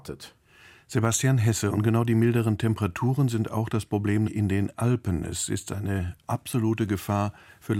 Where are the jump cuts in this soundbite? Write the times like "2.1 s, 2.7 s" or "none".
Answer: 4.3 s, 6.2 s